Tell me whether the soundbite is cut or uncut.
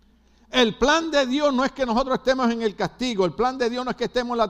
uncut